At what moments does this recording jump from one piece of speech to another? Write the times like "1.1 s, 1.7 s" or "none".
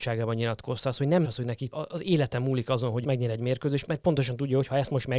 1.2 s, 1.7 s, 3.0 s, 3.9 s